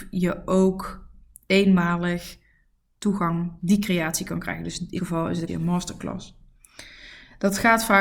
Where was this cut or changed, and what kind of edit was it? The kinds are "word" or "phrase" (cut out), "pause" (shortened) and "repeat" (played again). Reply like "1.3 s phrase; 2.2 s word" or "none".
3.6 s word; 5.0 s word; 5.5 s word